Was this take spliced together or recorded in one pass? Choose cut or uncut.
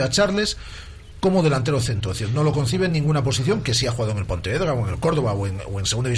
uncut